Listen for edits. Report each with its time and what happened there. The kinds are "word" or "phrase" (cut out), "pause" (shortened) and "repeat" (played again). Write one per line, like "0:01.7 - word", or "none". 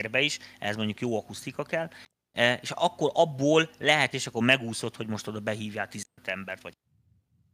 0:04.1 - phrase